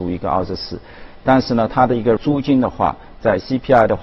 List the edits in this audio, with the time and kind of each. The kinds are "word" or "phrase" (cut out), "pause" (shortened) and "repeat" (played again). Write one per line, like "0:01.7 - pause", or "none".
0:02.2 - word